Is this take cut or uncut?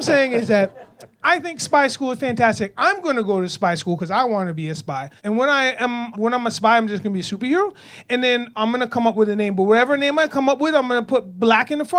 cut